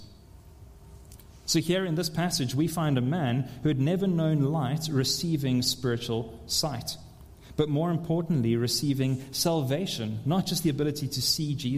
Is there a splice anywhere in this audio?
no; 0 cuts

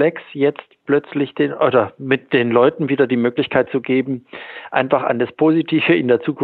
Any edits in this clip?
no; 0 cuts

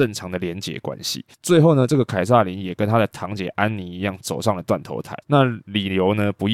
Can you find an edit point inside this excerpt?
yes; 2 cuts; at 1.3 s, 5.2 s

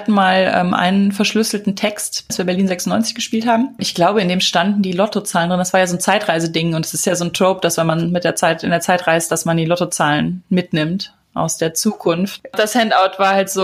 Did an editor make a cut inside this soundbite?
no; 0 cuts

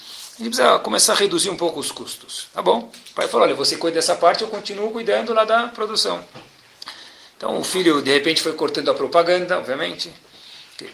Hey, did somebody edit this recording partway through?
no; 0 cuts

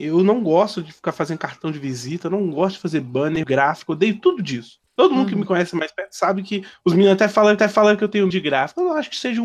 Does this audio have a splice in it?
yes; 4 cuts; at 3.4 s, 4.9 s, 7.6 s, 8.3 s

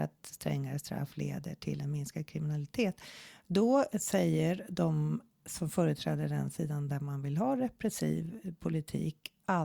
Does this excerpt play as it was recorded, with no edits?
yes; 0 cuts

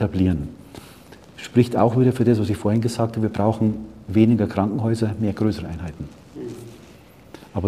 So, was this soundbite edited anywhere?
no; 0 cuts

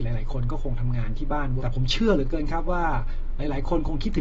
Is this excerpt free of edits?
no; 1 cut; at 1.6 s

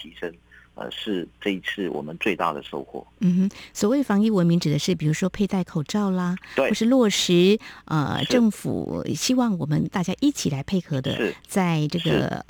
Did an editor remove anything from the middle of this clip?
yes; 1 cut; at 3.1 s

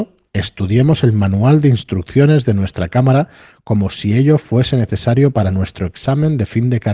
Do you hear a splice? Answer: no; 0 cuts

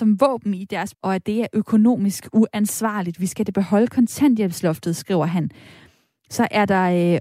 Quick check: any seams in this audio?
yes; 1 cut; at 0.9 s

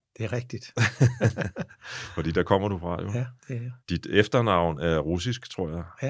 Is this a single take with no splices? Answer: no; 2 cuts; at 3.4 s, 3.8 s

